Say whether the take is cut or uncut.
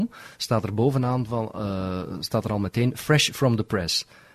uncut